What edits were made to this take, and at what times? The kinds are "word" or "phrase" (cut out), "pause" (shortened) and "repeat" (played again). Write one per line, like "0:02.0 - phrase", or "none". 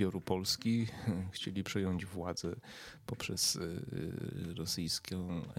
none